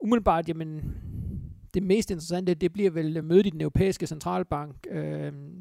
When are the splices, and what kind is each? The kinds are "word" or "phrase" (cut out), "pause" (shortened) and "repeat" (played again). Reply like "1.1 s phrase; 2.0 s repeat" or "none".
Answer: none